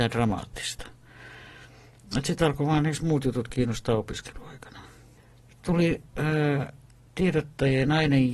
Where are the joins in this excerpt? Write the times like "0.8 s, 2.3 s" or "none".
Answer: none